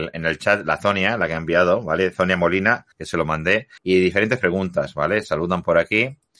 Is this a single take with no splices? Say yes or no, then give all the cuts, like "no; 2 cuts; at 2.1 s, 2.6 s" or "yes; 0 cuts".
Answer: no; 2 cuts; at 2.9 s, 3.8 s